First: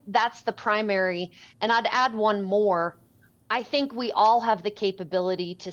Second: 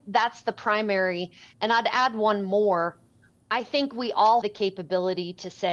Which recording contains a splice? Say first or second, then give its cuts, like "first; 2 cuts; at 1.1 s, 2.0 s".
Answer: second; 1 cut; at 4.4 s